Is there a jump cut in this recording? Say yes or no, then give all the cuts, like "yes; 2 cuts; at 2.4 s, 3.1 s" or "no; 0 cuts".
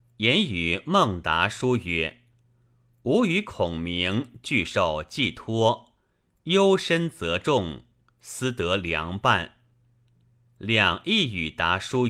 no; 0 cuts